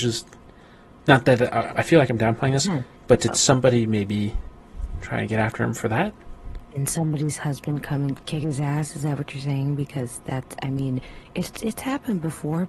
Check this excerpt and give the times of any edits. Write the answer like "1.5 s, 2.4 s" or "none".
1.7 s